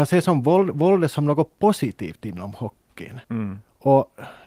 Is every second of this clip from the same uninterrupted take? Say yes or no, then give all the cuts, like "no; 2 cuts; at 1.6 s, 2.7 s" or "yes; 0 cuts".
no; 1 cut; at 3.2 s